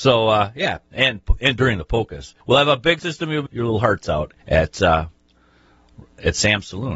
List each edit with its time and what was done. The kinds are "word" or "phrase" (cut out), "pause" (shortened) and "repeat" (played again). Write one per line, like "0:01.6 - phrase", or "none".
0:02.4 - pause
0:03.0 - word
0:03.5 - phrase
0:04.4 - pause